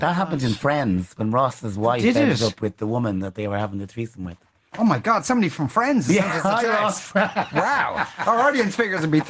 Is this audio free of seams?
yes; 0 cuts

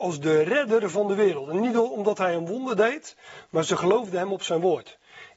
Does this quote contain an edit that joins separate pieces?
no; 0 cuts

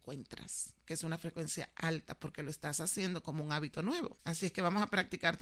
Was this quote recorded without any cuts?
yes; 0 cuts

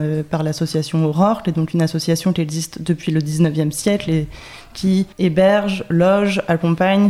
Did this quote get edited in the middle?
yes; 1 cut; at 5.1 s

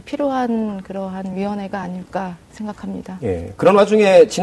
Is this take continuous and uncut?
yes; 0 cuts

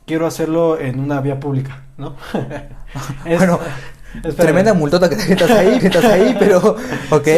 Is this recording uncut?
no; 1 cut; at 5.8 s

